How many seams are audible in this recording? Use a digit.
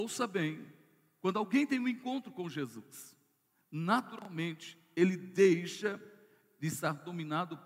0